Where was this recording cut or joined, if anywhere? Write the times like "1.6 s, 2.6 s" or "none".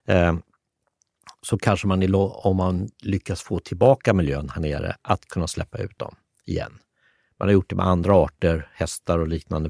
none